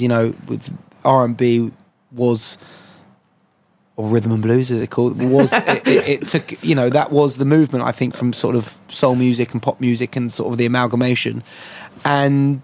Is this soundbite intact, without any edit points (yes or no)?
yes